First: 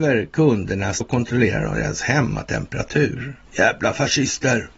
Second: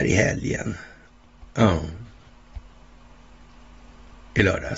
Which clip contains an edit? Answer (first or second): first